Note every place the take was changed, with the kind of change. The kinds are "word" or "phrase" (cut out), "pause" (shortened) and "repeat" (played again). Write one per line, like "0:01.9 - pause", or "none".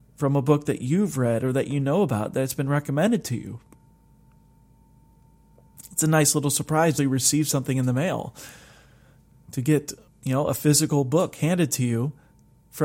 0:07.0 - word
0:10.1 - pause